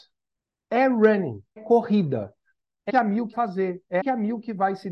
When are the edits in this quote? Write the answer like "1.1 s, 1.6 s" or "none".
1.6 s, 2.9 s, 3.3 s, 4.0 s